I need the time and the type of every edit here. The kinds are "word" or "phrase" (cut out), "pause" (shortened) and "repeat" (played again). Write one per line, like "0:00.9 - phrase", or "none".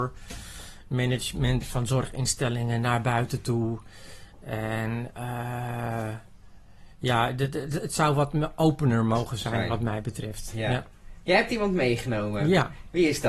0:01.6 - word